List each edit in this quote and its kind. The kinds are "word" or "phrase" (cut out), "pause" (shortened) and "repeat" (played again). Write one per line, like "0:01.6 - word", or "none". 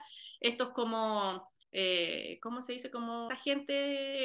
0:01.6 - pause
0:03.3 - word